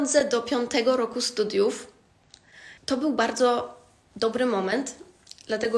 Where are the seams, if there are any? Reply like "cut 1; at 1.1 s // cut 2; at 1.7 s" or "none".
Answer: cut 1; at 2.8 s